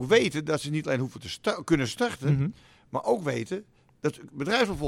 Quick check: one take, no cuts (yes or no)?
yes